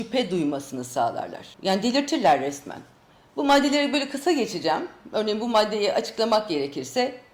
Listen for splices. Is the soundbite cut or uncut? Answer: cut